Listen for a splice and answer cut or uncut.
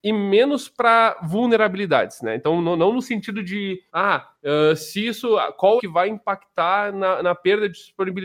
cut